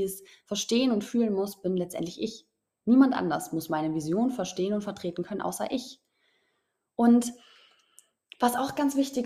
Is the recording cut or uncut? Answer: uncut